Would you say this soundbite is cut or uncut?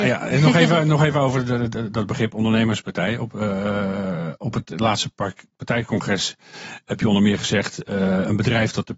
uncut